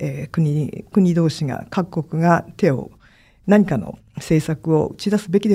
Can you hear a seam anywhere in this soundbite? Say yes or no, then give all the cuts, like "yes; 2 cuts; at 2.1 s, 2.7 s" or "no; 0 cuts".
no; 0 cuts